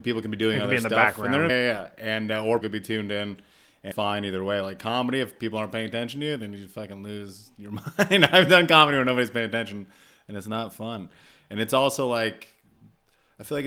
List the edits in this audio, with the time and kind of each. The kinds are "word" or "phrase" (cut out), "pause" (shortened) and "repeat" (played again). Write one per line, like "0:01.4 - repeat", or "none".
0:01.5 - word
0:02.6 - word
0:03.9 - word